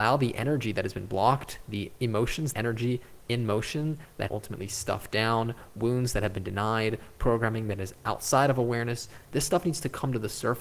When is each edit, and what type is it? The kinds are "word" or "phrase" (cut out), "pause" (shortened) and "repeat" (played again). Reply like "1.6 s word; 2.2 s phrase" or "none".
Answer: 2.5 s word; 4.3 s phrase